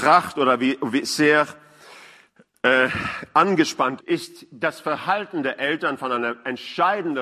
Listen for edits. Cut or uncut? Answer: cut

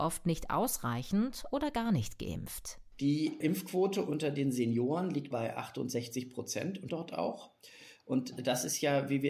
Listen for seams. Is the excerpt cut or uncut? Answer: cut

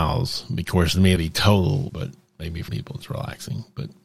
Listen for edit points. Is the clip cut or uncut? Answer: cut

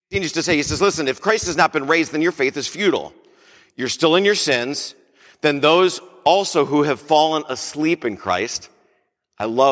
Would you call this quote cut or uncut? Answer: uncut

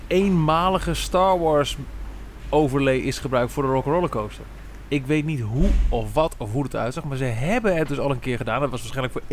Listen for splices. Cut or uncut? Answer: uncut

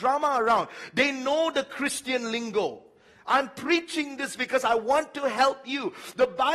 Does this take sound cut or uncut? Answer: uncut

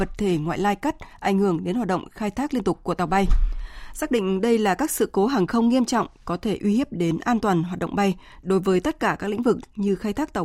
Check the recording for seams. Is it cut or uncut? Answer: uncut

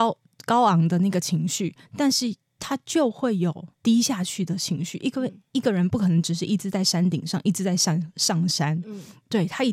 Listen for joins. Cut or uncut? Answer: cut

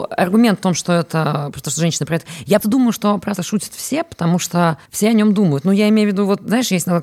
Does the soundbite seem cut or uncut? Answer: cut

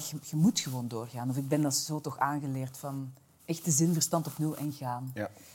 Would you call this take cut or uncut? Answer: cut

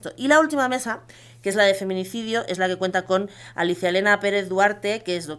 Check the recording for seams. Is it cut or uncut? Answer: uncut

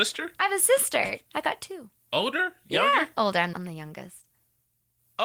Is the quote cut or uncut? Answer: cut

